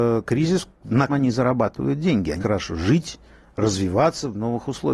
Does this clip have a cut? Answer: yes; 2 cuts; at 1.1 s, 2.4 s

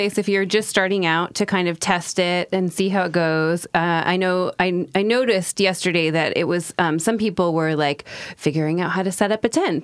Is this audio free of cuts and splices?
yes; 0 cuts

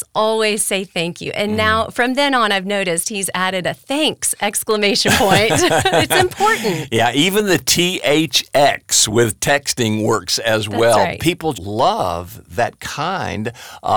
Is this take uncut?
no; 1 cut; at 11.5 s

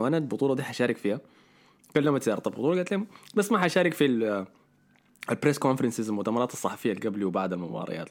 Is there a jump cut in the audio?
no; 0 cuts

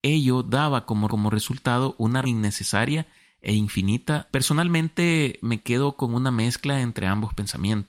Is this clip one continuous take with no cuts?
no; 3 cuts; at 1.1 s, 2.2 s, 4.3 s

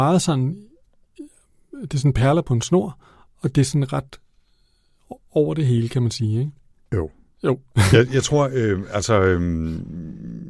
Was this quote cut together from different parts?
no; 0 cuts

